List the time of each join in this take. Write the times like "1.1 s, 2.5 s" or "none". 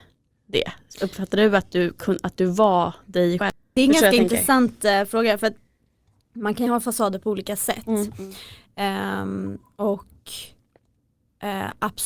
none